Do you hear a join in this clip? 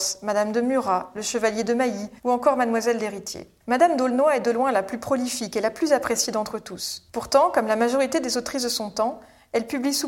yes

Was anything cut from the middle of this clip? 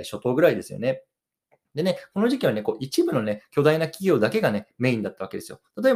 no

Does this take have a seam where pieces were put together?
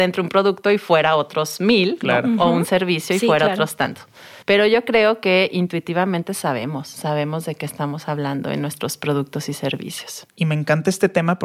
yes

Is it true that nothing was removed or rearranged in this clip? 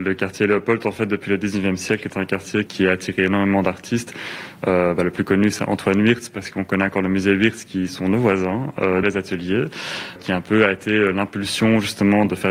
no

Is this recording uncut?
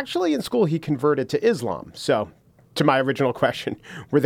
yes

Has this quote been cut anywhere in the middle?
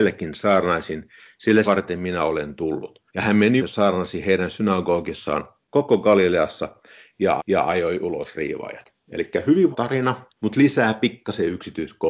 yes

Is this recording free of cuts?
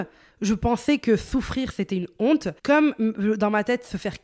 no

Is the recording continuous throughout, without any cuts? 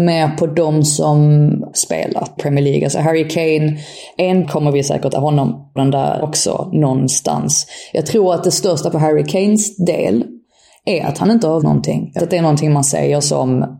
no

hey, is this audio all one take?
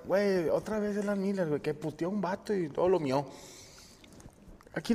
yes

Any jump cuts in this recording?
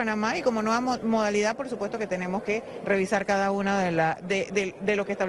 no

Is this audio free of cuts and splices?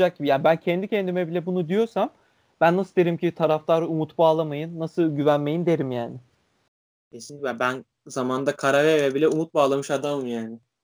yes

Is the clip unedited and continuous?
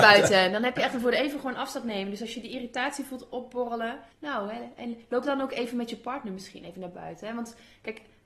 no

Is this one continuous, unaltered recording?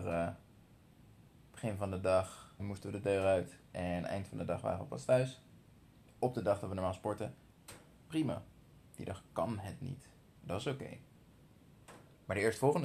no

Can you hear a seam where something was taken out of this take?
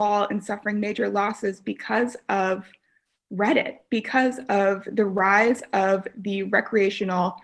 no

